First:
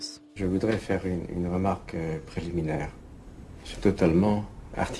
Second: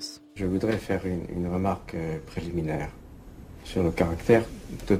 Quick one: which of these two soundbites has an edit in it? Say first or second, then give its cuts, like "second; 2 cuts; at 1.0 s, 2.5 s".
first; 1 cut; at 3.7 s